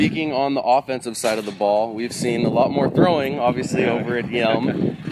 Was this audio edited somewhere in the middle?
no; 0 cuts

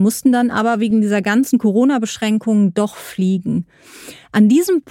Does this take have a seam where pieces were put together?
no; 0 cuts

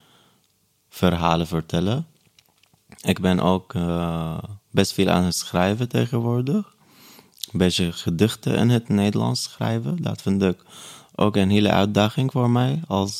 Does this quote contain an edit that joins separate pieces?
no; 0 cuts

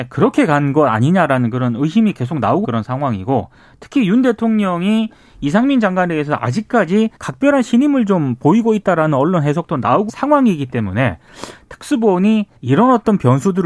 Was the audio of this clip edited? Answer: yes; 4 cuts; at 2.6 s, 7.2 s, 10.1 s, 12.6 s

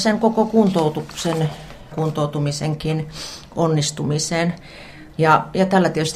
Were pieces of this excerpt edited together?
yes; 1 cut; at 1.9 s

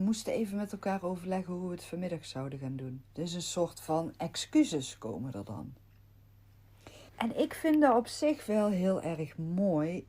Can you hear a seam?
yes; 2 cuts; at 3.1 s, 7.1 s

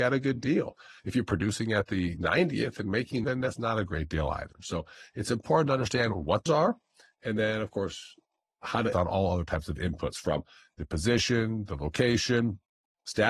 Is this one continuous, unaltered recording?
no; 4 cuts; at 1.0 s, 3.2 s, 6.5 s, 8.9 s

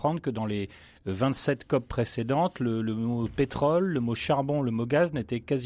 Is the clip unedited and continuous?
yes; 0 cuts

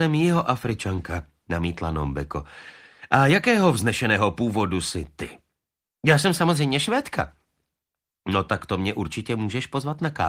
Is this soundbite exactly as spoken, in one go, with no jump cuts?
yes; 0 cuts

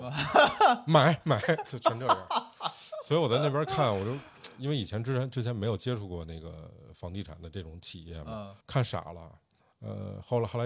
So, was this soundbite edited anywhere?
yes; 2 cuts; at 8.6 s, 9.6 s

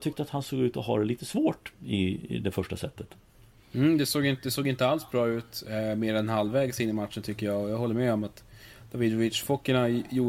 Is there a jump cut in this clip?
no; 0 cuts

